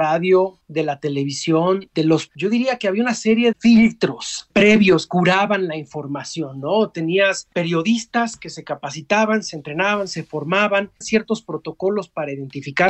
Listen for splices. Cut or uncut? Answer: cut